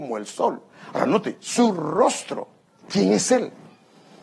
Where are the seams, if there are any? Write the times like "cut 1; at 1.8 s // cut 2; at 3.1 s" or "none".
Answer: cut 1; at 2.7 s